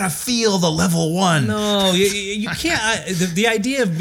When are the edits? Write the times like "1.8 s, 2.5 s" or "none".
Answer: none

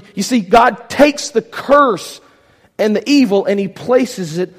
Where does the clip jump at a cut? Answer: none

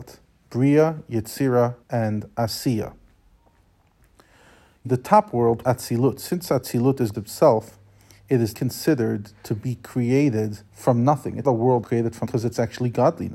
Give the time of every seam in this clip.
1.8 s, 4.8 s, 5.6 s, 7.1 s, 8.5 s, 10.7 s, 11.4 s, 11.8 s, 12.2 s

